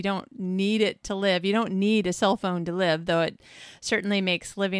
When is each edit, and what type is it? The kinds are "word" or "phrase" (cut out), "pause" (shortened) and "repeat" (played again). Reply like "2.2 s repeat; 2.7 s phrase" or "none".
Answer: none